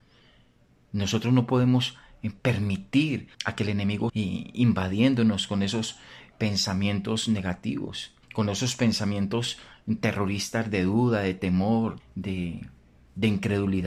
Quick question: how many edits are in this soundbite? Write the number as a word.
four